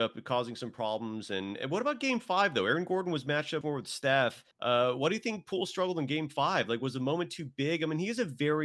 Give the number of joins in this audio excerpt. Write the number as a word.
two